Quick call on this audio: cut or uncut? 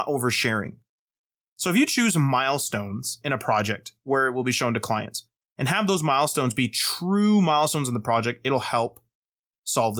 uncut